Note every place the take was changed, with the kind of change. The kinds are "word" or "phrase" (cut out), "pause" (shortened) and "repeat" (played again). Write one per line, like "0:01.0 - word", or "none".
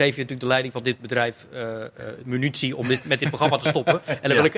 none